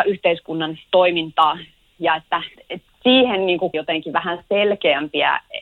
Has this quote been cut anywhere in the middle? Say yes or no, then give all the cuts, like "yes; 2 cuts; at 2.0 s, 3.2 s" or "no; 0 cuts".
yes; 2 cuts; at 2.6 s, 3.7 s